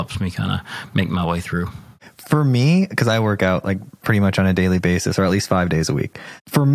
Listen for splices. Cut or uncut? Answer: uncut